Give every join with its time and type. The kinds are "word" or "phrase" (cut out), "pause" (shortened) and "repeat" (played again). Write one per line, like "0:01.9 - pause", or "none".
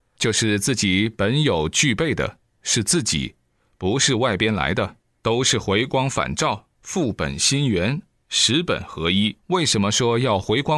0:06.7 - pause
0:09.4 - pause